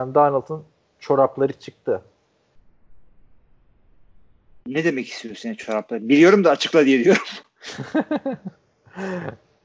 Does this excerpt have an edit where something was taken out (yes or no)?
no